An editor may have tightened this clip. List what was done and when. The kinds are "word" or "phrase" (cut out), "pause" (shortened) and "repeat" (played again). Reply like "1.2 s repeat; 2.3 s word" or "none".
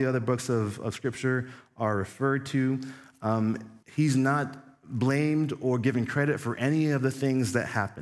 3.8 s pause